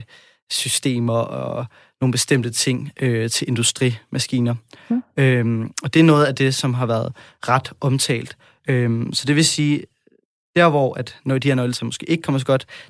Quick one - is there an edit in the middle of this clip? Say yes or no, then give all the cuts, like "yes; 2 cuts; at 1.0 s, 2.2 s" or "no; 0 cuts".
no; 0 cuts